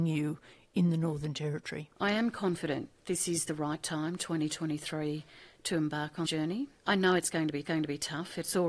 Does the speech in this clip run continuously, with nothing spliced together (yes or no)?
no